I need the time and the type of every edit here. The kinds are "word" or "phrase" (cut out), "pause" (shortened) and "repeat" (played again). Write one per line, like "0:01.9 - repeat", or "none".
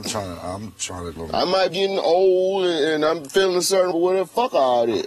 0:01.2 - word
0:01.7 - word
0:03.9 - word